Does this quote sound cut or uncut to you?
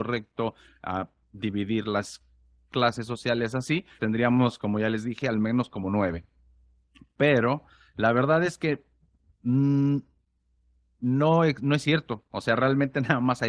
cut